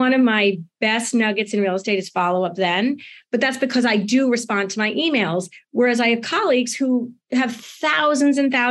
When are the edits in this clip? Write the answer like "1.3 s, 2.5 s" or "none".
none

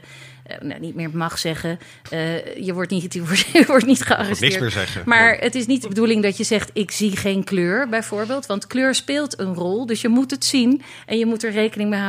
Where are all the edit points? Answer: none

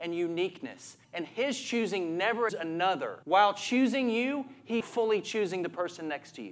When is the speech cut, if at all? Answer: 1.0 s, 2.5 s, 3.2 s, 4.8 s

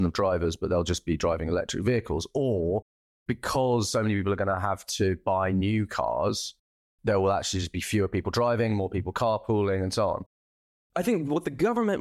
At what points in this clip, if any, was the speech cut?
none

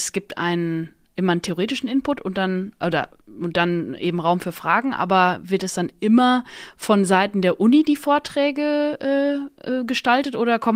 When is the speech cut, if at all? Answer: none

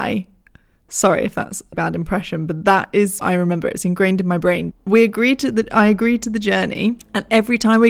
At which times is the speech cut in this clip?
1.7 s, 3.2 s, 4.7 s

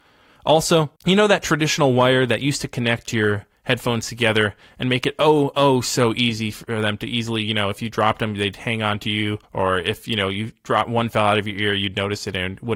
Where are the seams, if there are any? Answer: 1.0 s, 9.4 s

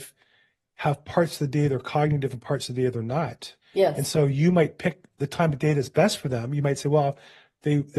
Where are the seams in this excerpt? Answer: 3.6 s

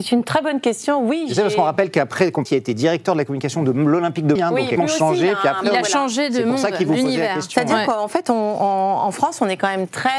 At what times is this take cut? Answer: 2.5 s, 4.4 s, 4.8 s

